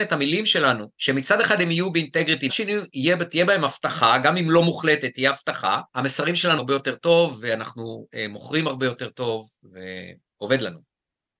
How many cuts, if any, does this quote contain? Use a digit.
4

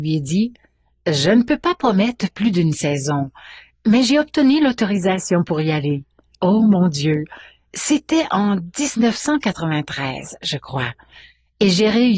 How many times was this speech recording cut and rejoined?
0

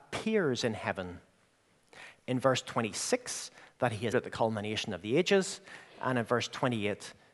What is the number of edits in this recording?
1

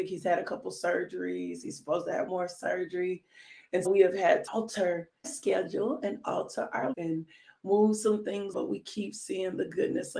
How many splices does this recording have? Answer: 6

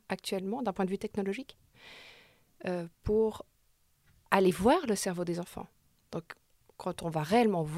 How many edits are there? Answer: 0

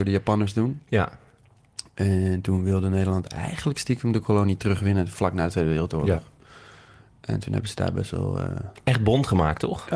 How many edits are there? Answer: 0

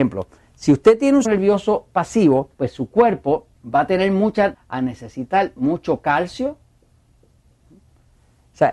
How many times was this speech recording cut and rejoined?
4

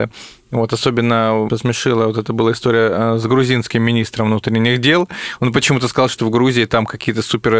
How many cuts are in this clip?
1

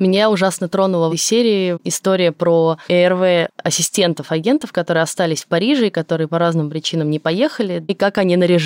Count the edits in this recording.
2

